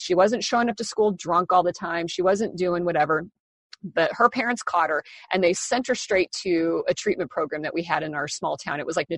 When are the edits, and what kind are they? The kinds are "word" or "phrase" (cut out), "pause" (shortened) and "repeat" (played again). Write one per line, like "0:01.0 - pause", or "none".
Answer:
none